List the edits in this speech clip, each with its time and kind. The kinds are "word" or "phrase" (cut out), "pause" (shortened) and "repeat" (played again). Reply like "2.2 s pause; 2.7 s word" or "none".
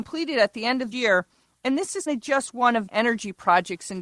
0.9 s word; 2.1 s word; 2.9 s word